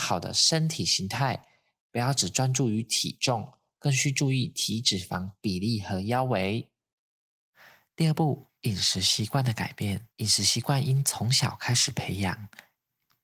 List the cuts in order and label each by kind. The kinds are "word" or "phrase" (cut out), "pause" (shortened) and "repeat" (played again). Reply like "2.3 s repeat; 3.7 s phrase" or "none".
8.6 s pause; 10.1 s pause